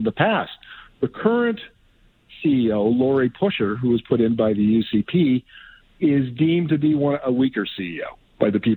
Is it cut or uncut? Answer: uncut